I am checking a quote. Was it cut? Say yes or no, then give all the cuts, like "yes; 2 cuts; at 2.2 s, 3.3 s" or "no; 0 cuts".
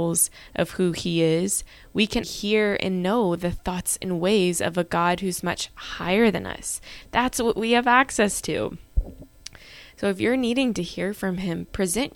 yes; 1 cut; at 2.2 s